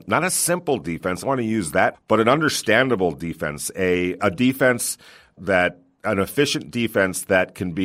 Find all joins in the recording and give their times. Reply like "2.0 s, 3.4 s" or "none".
1.2 s, 1.9 s, 4.2 s, 5.4 s